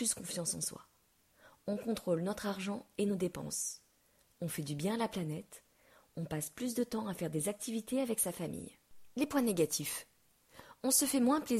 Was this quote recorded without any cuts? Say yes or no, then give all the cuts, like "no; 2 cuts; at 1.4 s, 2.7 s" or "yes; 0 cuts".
yes; 0 cuts